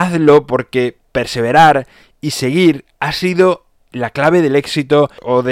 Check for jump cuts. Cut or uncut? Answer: uncut